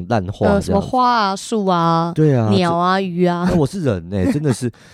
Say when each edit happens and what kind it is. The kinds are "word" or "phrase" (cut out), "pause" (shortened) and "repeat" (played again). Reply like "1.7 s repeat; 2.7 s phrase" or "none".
none